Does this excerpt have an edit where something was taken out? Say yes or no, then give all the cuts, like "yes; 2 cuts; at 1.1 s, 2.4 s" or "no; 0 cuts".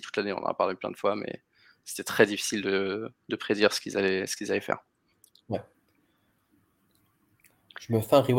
no; 0 cuts